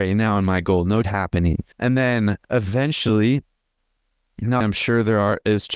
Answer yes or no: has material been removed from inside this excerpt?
yes